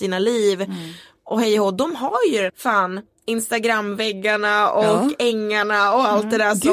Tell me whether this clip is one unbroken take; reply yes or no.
no